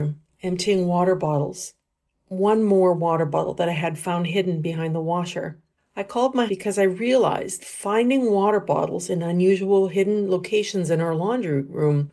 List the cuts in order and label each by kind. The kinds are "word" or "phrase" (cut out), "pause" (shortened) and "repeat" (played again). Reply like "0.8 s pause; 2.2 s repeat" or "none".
6.5 s word; 7.6 s word